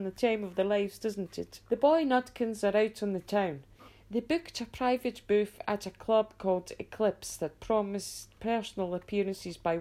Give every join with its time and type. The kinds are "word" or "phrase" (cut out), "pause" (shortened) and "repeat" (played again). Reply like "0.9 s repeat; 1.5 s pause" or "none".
1.7 s pause

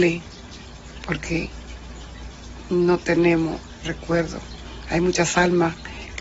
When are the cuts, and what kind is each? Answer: 3.8 s word

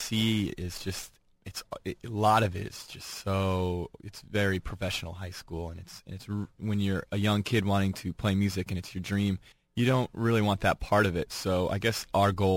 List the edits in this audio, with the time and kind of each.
9.5 s pause

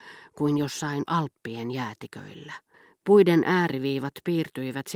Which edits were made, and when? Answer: 2.7 s pause

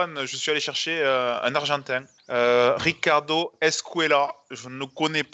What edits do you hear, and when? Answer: 2.2 s pause

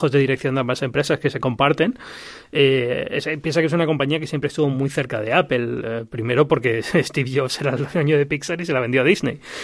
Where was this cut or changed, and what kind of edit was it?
none

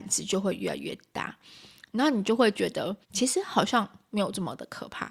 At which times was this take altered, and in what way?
3.0 s pause

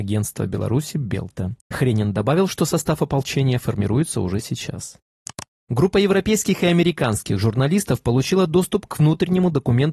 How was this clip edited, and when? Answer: none

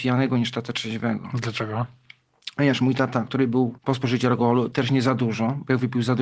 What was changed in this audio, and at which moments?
3.8 s pause

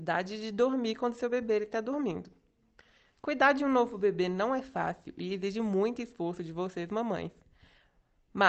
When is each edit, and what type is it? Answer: none

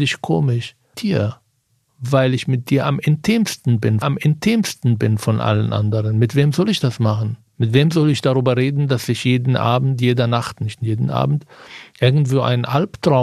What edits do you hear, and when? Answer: 0.9 s word; 1.7 s pause; 4.0 s repeat; 7.5 s pause

